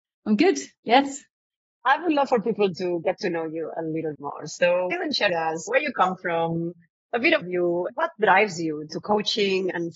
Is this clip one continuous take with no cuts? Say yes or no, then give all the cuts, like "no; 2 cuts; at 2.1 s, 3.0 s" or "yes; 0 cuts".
no; 5 cuts; at 4.1 s, 4.9 s, 5.3 s, 7.4 s, 7.9 s